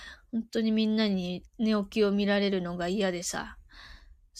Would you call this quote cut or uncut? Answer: cut